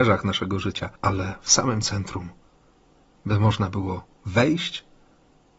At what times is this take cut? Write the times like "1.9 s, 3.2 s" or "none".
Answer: 1.0 s